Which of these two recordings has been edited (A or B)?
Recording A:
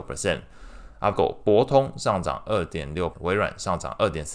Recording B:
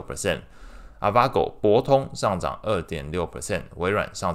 A